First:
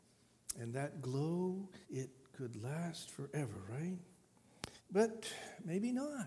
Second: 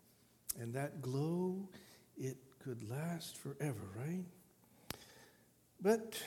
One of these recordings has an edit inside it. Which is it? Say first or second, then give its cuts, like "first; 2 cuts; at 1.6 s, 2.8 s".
first; 2 cuts; at 1.8 s, 4.8 s